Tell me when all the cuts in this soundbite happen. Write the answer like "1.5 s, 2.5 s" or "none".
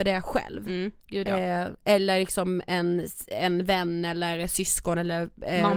1.0 s, 1.8 s